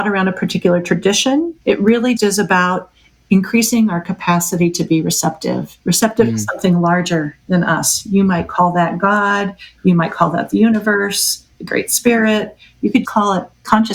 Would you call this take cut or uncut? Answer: cut